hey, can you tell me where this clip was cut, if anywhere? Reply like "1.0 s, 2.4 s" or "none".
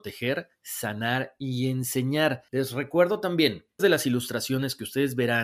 2.5 s, 3.8 s